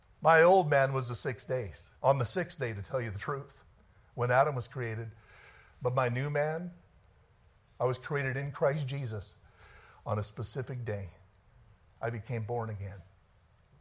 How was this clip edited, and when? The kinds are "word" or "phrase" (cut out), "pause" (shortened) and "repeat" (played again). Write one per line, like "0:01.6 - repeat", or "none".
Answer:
0:02.0 - pause